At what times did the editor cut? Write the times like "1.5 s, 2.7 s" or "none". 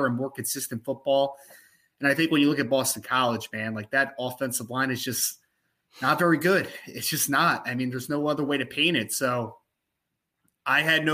none